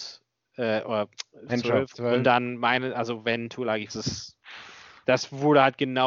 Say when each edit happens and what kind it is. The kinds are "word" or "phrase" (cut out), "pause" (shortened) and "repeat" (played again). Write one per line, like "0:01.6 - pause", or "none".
0:01.5 - word
0:02.2 - phrase
0:03.9 - phrase